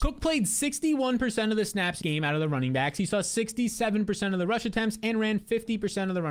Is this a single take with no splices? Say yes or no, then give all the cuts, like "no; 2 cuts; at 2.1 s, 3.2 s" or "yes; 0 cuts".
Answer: no; 1 cut; at 2.0 s